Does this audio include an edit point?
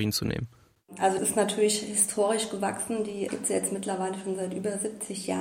yes; 2 cuts; at 1.2 s, 3.3 s

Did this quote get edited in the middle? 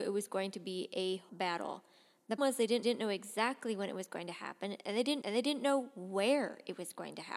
yes; 4 cuts; at 1.3 s, 2.4 s, 2.8 s, 5.2 s

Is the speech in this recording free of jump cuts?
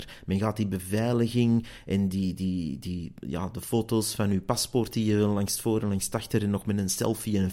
yes; 0 cuts

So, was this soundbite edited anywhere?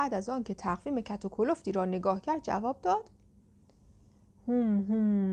no; 0 cuts

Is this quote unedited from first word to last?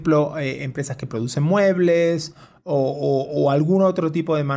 yes; 0 cuts

